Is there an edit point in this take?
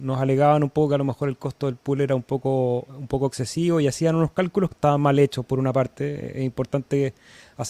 yes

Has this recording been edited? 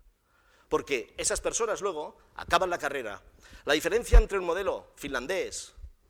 no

